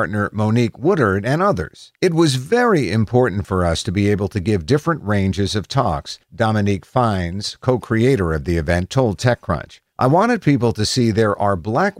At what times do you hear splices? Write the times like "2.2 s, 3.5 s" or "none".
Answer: 2.0 s, 6.2 s, 9.9 s